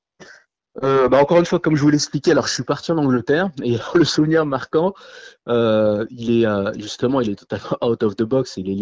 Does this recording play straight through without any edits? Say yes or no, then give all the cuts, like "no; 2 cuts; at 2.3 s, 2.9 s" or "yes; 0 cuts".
yes; 0 cuts